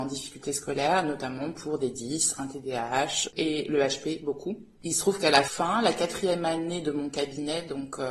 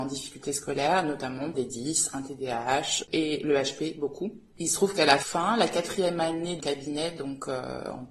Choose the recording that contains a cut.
second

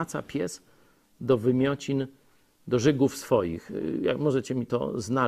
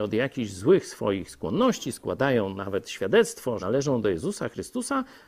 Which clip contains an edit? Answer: second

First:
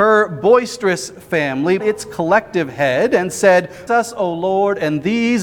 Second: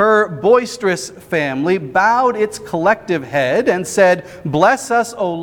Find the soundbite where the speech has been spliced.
first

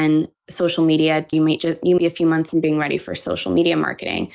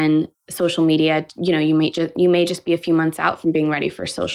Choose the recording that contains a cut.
first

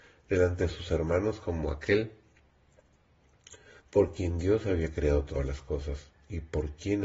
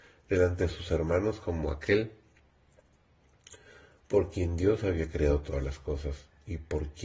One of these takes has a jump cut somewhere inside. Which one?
first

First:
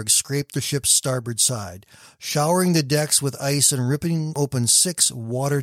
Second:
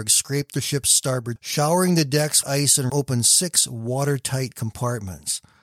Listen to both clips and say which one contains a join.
second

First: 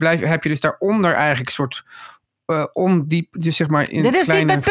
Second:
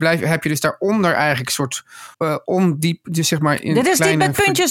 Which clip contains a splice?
second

